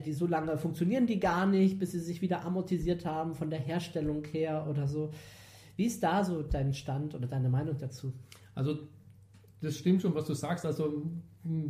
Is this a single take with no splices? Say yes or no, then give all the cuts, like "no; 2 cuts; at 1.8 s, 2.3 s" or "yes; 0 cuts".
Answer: yes; 0 cuts